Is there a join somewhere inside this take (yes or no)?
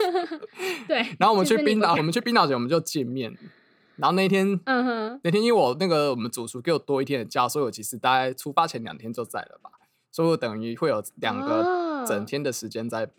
yes